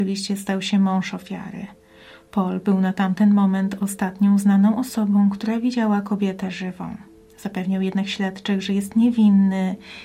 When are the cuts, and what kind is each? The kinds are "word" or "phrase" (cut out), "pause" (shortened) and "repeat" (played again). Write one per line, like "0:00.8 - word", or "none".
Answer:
none